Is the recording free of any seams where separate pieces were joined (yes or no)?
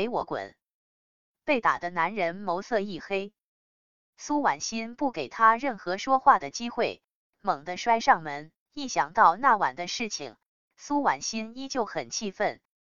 no